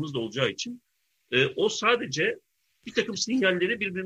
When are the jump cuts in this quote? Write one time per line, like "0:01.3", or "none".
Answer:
none